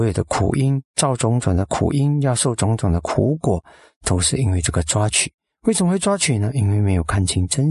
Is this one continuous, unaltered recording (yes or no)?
yes